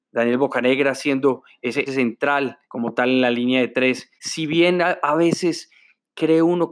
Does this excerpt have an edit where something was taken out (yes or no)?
yes